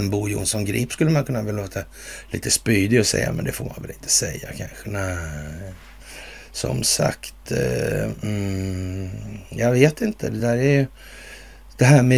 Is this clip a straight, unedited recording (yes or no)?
yes